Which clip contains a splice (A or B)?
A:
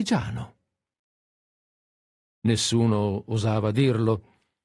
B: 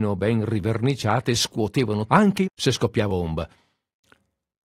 B